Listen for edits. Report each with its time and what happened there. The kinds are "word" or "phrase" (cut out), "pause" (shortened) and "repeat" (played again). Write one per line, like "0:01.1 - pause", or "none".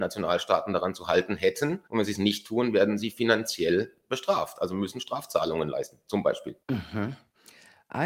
0:01.9 - pause
0:06.6 - pause